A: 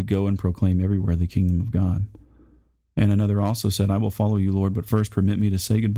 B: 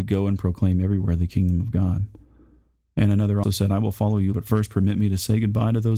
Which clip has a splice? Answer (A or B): B